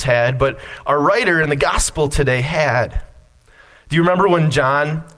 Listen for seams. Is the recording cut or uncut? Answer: uncut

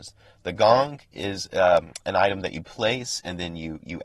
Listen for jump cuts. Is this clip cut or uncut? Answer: uncut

